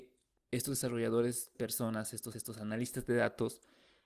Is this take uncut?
no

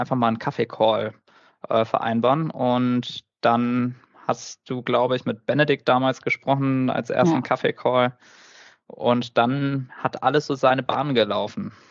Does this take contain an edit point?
no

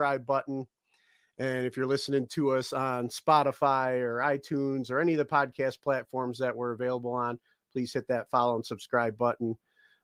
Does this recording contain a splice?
no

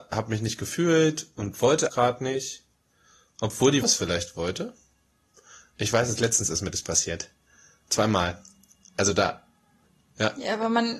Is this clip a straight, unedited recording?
no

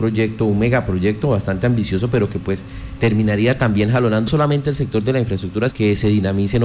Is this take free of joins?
no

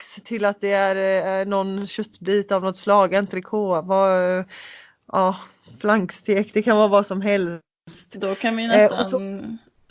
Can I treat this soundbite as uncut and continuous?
yes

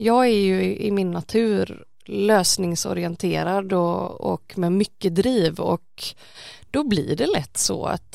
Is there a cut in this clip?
no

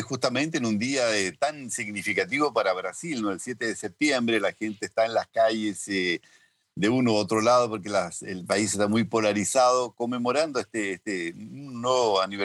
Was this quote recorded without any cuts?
yes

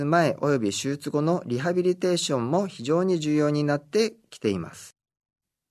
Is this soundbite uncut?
yes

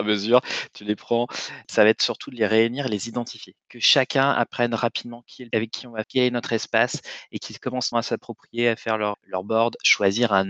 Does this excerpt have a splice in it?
yes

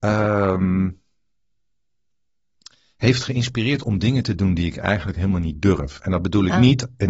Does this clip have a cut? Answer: no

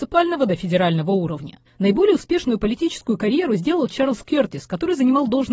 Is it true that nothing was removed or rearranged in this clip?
no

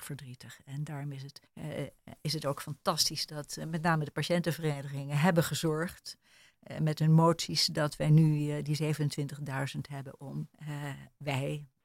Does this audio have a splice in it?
yes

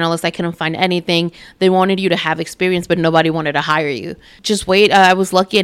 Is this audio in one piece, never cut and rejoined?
yes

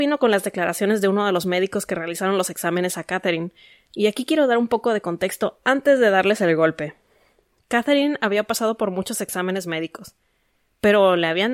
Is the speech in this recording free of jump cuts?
yes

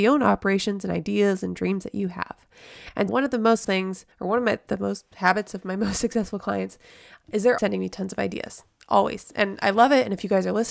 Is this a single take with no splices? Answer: no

